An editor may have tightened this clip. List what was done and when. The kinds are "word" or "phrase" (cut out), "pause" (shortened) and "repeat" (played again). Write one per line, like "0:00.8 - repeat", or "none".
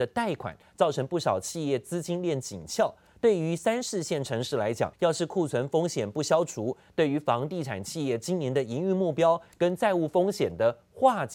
0:04.9 - pause